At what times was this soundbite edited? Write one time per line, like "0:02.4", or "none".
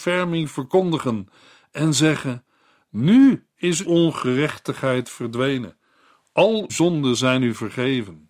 0:03.8
0:06.7